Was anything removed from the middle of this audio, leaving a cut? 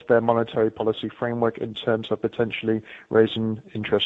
no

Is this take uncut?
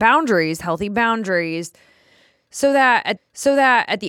no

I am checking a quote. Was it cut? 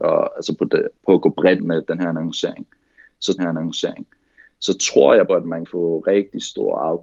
yes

